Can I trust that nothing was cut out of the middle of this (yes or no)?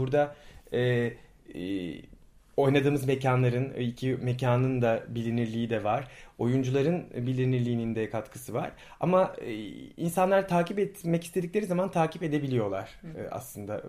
yes